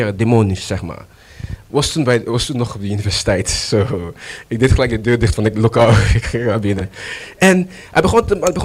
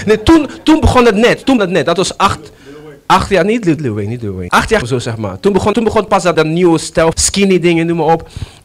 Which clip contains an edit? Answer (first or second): second